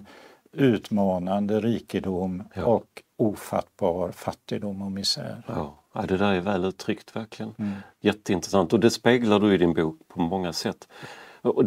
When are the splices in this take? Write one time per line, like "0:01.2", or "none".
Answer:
none